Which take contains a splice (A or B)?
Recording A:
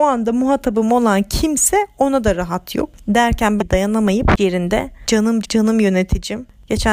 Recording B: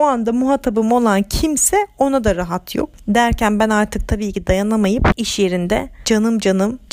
A